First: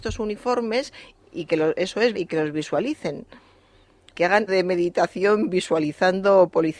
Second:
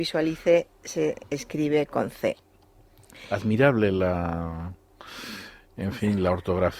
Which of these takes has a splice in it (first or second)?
first